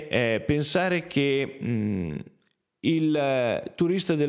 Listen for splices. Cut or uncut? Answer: uncut